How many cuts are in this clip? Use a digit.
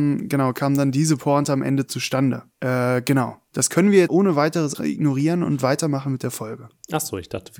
3